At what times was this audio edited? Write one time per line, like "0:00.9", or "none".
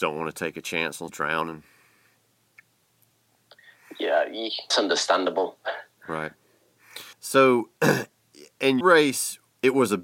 0:01.1
0:04.7
0:07.1
0:08.8